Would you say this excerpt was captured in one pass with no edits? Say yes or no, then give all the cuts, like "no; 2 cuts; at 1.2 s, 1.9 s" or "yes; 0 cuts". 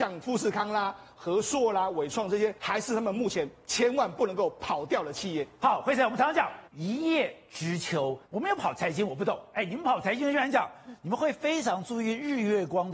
no; 3 cuts; at 2.6 s, 6.7 s, 8.2 s